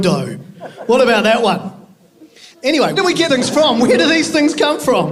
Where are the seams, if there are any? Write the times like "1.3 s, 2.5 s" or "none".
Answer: 3.0 s, 3.3 s